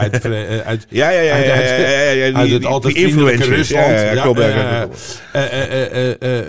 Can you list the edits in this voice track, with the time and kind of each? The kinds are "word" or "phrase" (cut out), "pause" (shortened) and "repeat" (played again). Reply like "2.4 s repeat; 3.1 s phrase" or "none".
none